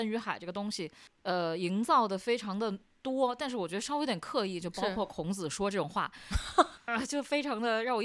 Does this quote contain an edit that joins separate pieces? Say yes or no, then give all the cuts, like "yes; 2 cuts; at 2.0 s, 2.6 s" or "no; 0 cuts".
yes; 1 cut; at 6.9 s